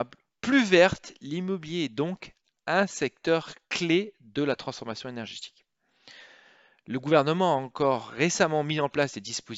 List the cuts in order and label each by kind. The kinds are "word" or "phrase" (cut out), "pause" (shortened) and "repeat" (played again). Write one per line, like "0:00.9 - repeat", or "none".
none